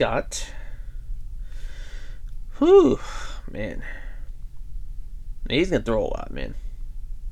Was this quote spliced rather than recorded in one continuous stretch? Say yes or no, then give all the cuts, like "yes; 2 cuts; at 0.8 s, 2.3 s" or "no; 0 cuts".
no; 0 cuts